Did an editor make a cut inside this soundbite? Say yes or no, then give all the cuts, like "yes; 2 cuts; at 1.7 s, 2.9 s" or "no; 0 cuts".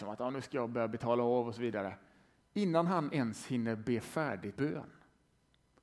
yes; 1 cut; at 4.6 s